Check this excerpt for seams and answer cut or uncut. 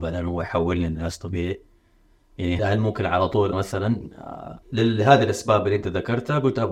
cut